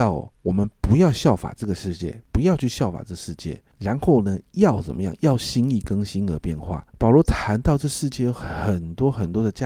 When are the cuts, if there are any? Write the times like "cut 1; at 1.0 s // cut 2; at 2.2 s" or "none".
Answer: cut 1; at 2.2 s // cut 2; at 3.7 s // cut 3; at 6.9 s